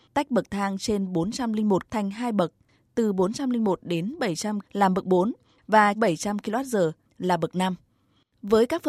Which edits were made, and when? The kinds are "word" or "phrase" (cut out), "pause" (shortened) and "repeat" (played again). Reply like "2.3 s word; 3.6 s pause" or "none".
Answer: 1.9 s word; 4.6 s word; 5.9 s word